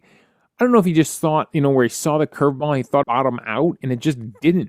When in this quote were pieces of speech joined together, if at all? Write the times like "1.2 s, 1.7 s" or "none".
3.0 s